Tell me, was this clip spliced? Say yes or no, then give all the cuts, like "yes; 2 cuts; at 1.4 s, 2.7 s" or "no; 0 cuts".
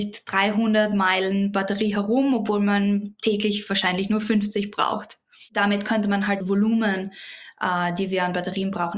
yes; 1 cut; at 6.4 s